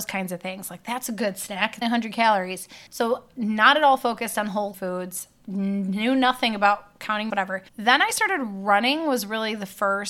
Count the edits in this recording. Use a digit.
5